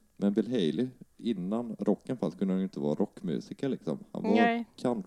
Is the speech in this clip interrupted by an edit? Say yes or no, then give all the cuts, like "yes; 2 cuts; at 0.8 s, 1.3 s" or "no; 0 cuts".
no; 0 cuts